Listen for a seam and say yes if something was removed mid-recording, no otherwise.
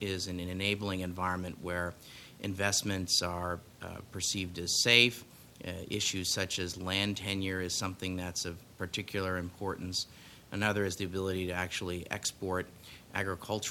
no